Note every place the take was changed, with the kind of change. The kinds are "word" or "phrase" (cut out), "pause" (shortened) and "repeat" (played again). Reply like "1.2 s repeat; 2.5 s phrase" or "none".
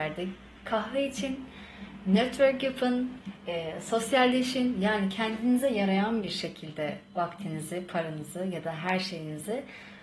none